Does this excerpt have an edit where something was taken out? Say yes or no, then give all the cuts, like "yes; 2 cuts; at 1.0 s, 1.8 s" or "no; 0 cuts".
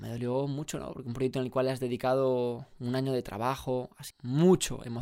yes; 1 cut; at 4.1 s